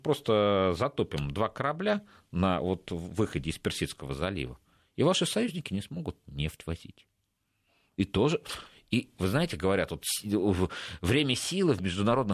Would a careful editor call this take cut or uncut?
uncut